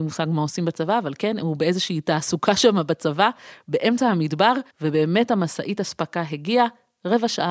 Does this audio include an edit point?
yes; 1 cut; at 4.7 s

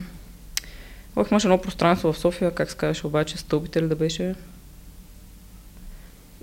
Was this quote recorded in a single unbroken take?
yes; 0 cuts

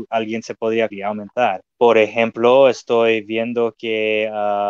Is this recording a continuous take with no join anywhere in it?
no; 2 cuts; at 0.9 s, 1.7 s

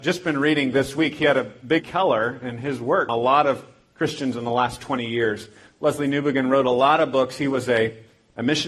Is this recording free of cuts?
no; 2 cuts; at 1.8 s, 3.1 s

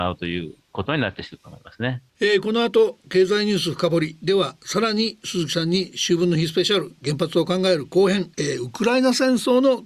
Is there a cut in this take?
yes; 2 cuts; at 2.1 s, 8.3 s

